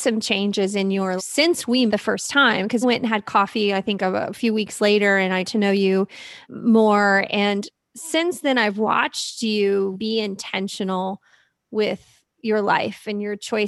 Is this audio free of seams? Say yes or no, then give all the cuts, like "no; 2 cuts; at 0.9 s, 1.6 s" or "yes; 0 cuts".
no; 6 cuts; at 1.2 s, 1.9 s, 2.8 s, 5.4 s, 6.5 s, 9.9 s